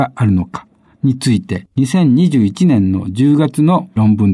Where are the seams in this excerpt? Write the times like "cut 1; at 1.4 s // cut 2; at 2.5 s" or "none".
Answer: cut 1; at 1.7 s